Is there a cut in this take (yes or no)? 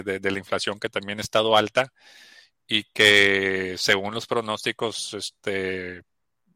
no